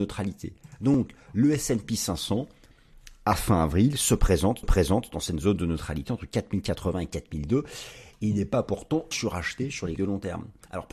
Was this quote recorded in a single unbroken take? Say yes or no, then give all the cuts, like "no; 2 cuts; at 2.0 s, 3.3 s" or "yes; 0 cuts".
no; 3 cuts; at 4.6 s, 9.1 s, 10.0 s